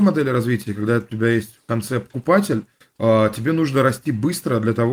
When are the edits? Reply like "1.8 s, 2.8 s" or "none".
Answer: none